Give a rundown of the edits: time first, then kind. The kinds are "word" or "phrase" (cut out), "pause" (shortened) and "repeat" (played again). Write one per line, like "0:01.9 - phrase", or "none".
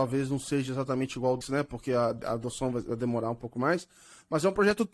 0:01.4 - phrase